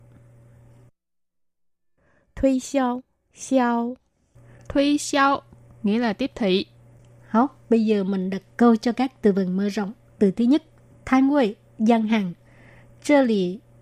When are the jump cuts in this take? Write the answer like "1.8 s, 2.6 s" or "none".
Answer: 3.2 s